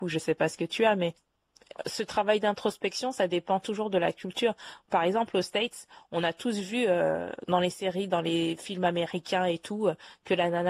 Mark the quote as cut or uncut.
uncut